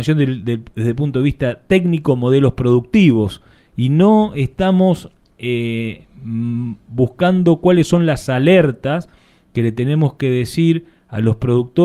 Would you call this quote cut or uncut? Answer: uncut